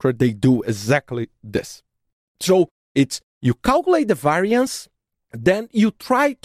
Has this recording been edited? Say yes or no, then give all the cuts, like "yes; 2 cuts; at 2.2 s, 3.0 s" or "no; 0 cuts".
no; 0 cuts